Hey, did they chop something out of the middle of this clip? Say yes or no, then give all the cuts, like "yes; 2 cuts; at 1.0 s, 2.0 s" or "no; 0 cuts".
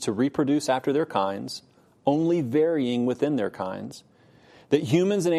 no; 0 cuts